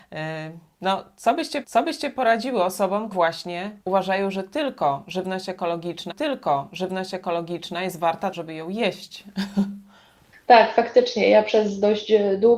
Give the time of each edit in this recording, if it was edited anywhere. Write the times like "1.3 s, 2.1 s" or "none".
1.6 s, 3.1 s, 3.8 s, 6.1 s, 8.3 s